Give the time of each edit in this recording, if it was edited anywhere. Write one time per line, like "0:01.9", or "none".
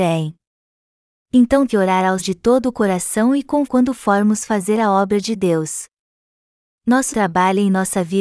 0:01.7
0:02.2
0:03.6
0:07.1